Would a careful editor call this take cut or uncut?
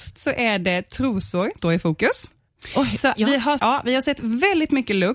cut